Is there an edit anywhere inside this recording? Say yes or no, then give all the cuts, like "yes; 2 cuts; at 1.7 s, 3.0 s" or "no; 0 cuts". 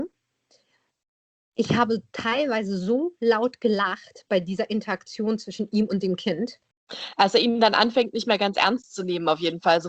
no; 0 cuts